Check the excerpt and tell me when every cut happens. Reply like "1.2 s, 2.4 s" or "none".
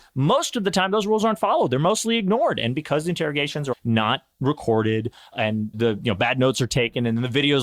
3.7 s, 5.3 s, 5.7 s